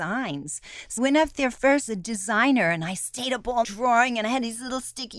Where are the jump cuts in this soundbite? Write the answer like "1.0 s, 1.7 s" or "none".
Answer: 1.0 s, 1.9 s, 3.6 s